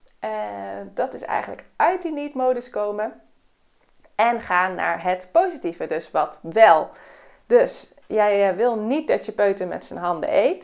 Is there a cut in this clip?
no; 0 cuts

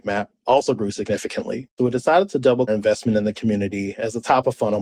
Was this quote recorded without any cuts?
no; 2 cuts; at 1.8 s, 2.7 s

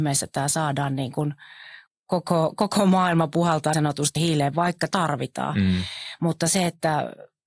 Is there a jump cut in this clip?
yes; 4 cuts; at 1.9 s, 3.7 s, 4.2 s, 4.9 s

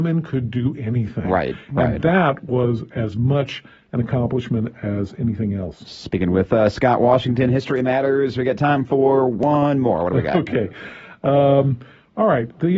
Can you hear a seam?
no; 0 cuts

